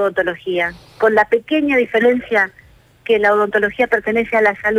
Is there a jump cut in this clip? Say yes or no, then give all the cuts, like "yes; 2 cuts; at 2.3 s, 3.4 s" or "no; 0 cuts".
no; 0 cuts